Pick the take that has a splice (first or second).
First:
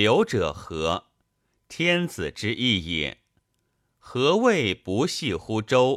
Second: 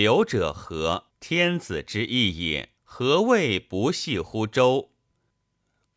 second